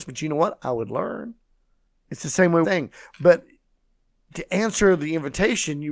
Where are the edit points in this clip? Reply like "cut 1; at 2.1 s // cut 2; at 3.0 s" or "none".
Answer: cut 1; at 1.9 s // cut 2; at 2.6 s